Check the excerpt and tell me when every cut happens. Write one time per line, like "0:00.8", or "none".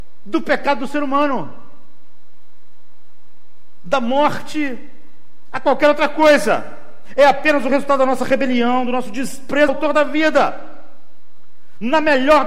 0:09.7